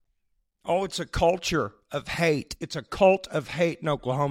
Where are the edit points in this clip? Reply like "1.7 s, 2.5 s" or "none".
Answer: none